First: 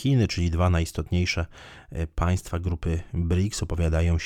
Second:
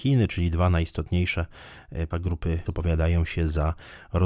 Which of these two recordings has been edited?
second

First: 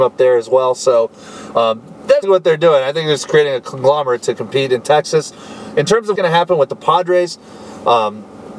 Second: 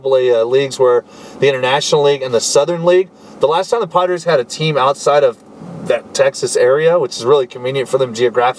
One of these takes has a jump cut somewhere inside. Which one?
first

